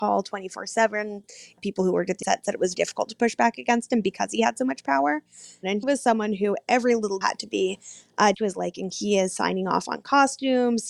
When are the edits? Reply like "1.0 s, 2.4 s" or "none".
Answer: 2.2 s, 2.7 s, 5.8 s, 7.2 s, 8.3 s, 8.9 s